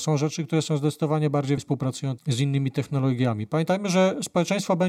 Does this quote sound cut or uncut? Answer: cut